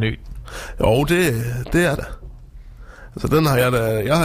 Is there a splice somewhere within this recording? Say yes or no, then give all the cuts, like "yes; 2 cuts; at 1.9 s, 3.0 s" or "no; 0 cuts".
yes; 1 cut; at 2.0 s